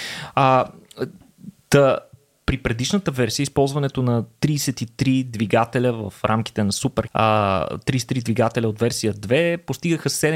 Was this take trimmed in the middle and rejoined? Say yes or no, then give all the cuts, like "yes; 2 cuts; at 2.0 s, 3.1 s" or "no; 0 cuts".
yes; 1 cut; at 7.1 s